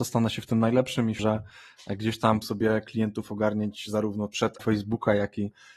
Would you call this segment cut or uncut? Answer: cut